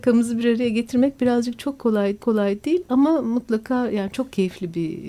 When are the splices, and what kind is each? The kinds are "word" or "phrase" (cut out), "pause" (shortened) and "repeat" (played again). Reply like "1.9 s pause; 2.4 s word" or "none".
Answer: 2.2 s repeat